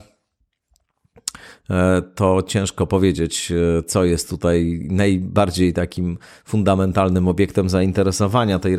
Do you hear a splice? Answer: no; 0 cuts

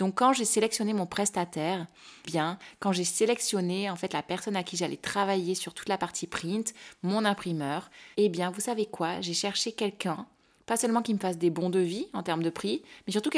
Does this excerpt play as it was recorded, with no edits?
no; 2 cuts; at 2.3 s, 8.1 s

